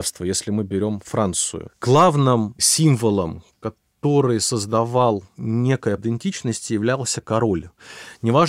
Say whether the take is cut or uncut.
cut